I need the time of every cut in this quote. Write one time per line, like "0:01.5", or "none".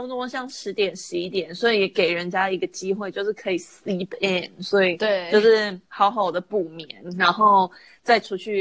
0:05.9